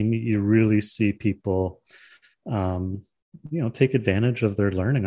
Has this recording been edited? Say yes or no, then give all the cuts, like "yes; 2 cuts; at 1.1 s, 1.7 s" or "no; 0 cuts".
no; 0 cuts